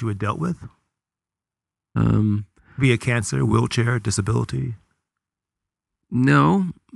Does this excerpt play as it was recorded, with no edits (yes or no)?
yes